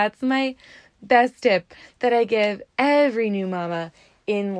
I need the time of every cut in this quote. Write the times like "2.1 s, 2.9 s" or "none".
2.7 s